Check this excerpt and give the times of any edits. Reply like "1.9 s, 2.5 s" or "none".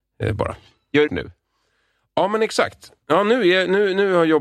1.1 s, 3.0 s